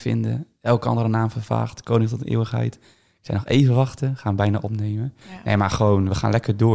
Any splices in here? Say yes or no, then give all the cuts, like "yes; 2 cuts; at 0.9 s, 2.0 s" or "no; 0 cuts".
yes; 1 cut; at 5.2 s